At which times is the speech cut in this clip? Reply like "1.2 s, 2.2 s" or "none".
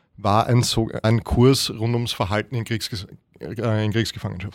1.0 s